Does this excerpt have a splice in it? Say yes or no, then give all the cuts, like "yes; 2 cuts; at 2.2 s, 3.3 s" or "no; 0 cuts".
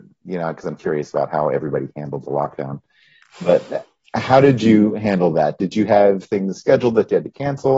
no; 0 cuts